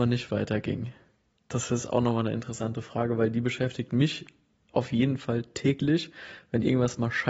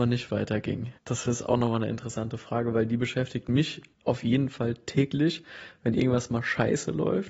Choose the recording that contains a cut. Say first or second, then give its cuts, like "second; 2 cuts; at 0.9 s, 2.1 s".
second; 2 cuts; at 1.0 s, 3.9 s